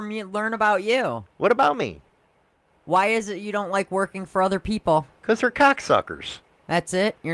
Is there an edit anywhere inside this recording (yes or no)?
no